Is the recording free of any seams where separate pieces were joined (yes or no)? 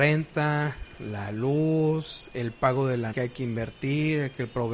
no